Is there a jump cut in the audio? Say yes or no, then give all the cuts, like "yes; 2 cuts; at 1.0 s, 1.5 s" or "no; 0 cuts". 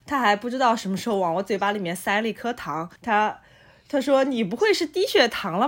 yes; 1 cut; at 3.0 s